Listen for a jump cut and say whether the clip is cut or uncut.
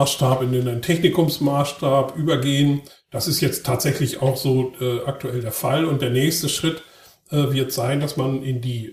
uncut